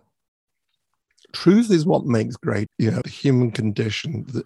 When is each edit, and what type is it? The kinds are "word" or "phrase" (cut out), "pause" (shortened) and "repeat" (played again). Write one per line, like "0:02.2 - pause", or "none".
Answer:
0:02.7 - word
0:03.0 - word